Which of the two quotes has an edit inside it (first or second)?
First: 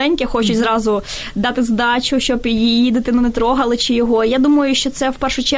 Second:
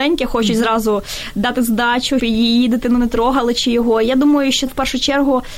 second